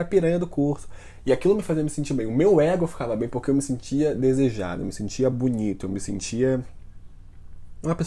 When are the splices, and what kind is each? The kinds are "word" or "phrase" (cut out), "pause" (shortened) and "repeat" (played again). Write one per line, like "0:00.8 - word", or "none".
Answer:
none